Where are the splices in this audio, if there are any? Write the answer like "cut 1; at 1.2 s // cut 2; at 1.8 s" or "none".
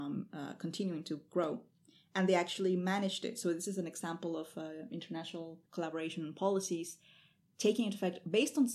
cut 1; at 5.7 s